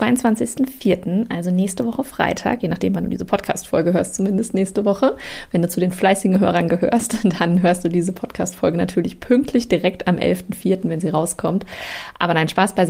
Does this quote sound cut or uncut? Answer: uncut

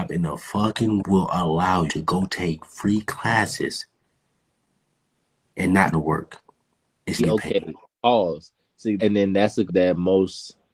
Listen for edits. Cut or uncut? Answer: cut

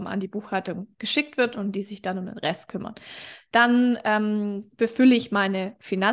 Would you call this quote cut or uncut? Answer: uncut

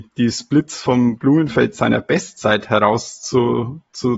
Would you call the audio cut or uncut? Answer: uncut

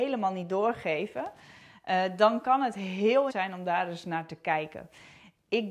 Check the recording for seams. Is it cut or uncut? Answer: cut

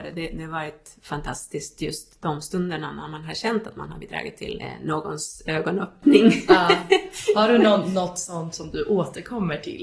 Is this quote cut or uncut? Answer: uncut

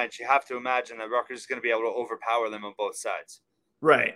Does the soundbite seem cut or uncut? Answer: uncut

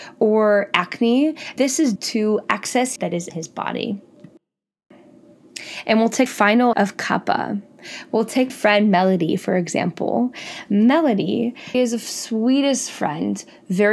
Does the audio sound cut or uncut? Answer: cut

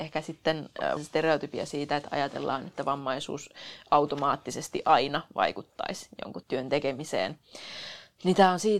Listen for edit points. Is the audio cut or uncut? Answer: cut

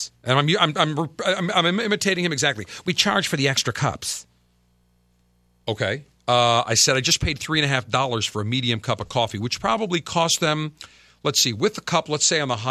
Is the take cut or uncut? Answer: uncut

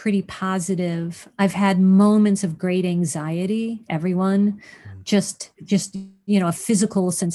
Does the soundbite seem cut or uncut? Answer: cut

